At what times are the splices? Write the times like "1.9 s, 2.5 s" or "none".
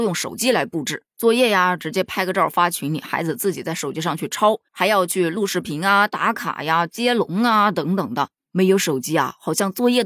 1.1 s, 4.7 s